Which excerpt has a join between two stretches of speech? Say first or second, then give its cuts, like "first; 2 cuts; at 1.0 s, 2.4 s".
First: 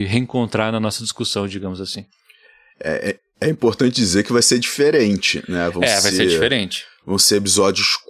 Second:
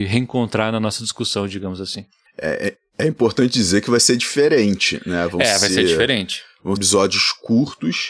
second; 2 cuts; at 2.3 s, 6.8 s